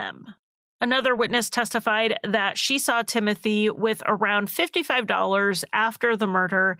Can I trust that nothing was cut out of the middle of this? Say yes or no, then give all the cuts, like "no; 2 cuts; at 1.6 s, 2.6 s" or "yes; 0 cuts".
yes; 0 cuts